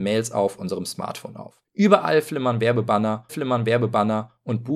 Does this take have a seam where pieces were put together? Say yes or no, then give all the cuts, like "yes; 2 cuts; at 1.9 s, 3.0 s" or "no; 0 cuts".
yes; 2 cuts; at 1.6 s, 3.3 s